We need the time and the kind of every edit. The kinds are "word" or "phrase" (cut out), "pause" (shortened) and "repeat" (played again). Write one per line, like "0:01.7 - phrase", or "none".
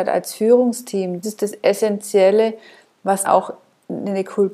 0:01.2 - word
0:03.2 - word